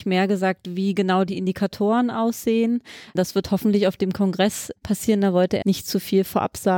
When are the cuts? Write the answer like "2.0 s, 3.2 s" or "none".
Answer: 5.6 s